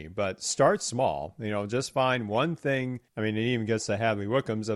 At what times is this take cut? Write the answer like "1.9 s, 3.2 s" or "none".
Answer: 3.1 s